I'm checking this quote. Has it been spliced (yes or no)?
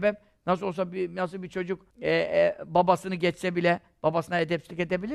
yes